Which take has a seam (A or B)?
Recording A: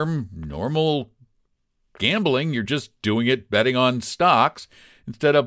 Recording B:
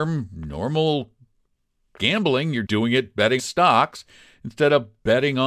B